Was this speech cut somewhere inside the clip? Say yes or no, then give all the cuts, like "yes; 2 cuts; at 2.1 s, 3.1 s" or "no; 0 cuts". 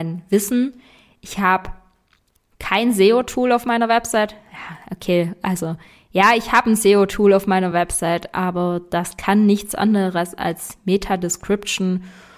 no; 0 cuts